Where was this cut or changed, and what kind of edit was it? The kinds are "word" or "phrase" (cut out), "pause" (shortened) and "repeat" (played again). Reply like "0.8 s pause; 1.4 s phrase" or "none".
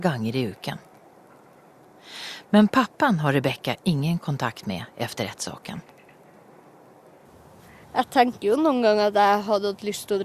none